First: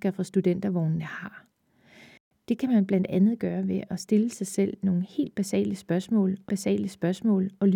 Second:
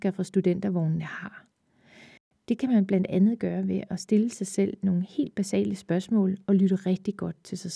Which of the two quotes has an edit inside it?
first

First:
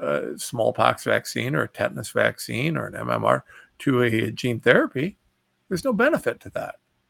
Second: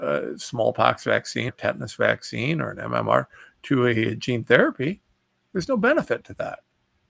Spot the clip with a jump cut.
second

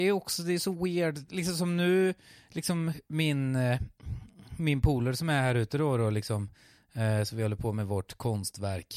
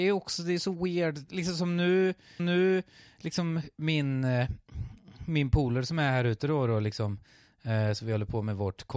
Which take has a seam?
second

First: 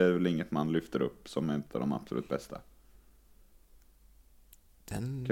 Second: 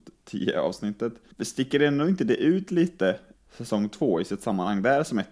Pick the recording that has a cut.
second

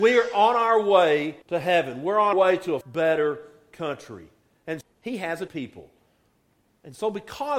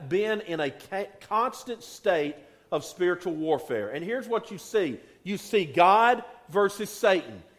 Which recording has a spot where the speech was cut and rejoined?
first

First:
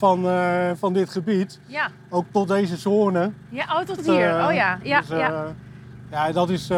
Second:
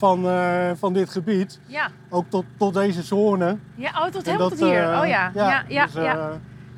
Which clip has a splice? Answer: first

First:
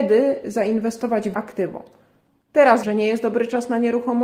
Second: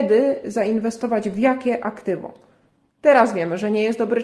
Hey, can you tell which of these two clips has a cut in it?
first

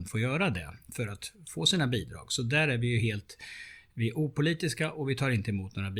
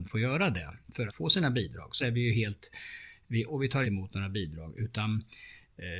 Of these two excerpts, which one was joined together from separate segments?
second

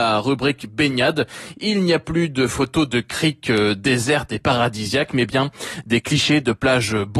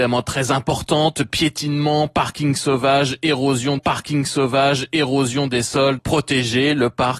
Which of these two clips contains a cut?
second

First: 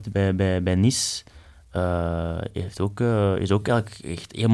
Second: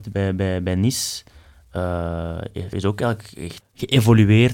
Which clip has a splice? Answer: second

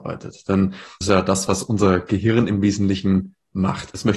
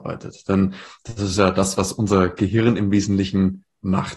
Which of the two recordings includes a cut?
first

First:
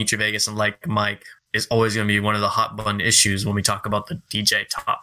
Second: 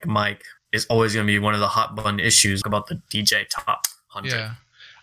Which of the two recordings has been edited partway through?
second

